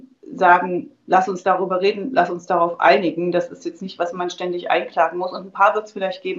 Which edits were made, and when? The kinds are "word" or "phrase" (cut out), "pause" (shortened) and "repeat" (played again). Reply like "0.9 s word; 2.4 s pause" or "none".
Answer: none